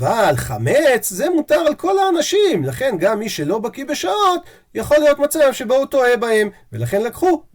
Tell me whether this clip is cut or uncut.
uncut